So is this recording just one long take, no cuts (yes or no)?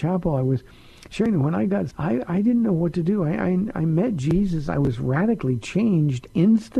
no